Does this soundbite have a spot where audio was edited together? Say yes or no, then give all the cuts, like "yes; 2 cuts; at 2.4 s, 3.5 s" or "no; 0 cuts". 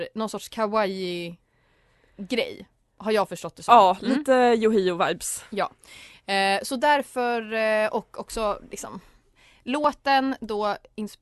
no; 0 cuts